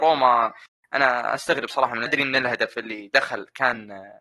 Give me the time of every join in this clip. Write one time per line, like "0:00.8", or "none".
0:02.1

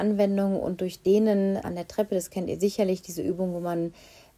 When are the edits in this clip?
0:01.6

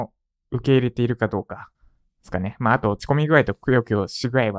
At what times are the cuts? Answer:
0:01.7

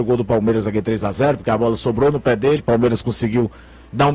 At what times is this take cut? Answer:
0:02.6

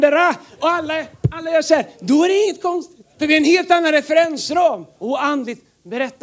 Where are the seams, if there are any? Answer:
0:02.4
0:03.1
0:04.9

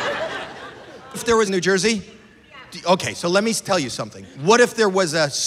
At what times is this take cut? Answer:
0:01.1
0:01.5
0:04.3

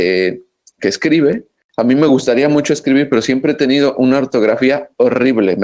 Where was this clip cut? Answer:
none

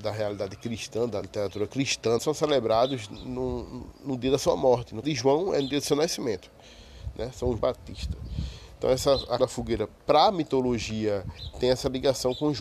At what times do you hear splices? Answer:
0:01.2
0:02.2
0:05.0
0:07.6
0:09.4
0:10.0
0:11.5

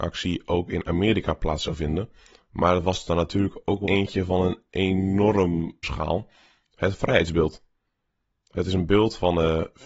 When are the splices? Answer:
0:03.8
0:05.8

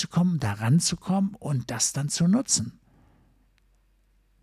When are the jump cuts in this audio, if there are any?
none

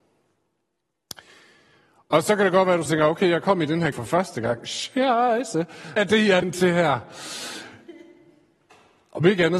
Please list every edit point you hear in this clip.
0:02.9
0:03.9
0:06.0
0:06.4

